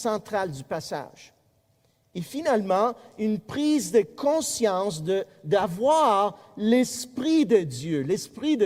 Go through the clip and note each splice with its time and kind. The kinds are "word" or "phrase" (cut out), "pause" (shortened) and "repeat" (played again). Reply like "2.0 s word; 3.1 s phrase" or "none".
none